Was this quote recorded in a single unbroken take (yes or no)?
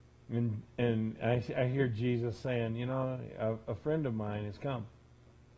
yes